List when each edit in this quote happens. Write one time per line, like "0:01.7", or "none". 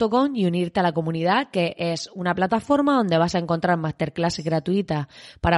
none